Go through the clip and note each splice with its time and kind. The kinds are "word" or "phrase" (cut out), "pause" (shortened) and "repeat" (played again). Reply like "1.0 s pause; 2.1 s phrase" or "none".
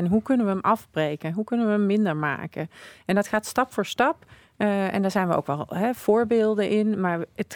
none